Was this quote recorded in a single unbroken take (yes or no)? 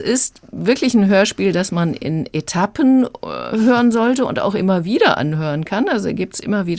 yes